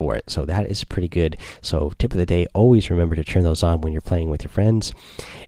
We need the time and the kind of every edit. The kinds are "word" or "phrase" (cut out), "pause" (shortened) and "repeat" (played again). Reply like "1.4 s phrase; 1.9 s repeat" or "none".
none